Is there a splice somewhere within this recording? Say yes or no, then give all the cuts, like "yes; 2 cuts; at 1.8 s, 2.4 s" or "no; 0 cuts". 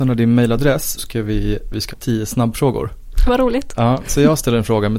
yes; 3 cuts; at 1.0 s, 1.9 s, 3.3 s